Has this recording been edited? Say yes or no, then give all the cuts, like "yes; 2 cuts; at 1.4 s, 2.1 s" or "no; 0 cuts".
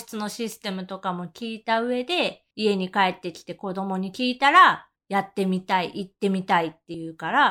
yes; 2 cuts; at 2.5 s, 5.0 s